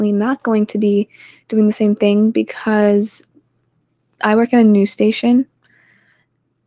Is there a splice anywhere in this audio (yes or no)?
no